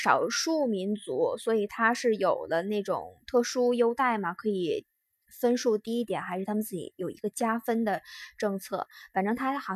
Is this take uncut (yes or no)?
yes